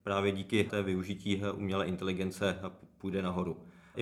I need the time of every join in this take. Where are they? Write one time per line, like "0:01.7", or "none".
none